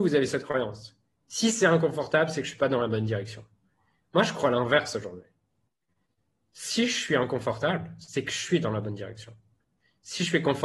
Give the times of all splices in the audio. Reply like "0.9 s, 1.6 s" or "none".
none